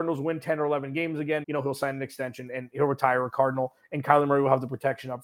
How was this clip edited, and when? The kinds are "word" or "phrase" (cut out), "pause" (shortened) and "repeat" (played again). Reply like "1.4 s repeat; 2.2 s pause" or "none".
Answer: 1.4 s word; 2.7 s word